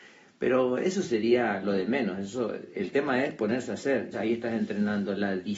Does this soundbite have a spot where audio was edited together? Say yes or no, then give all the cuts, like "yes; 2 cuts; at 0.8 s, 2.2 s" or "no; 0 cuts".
yes; 1 cut; at 4.1 s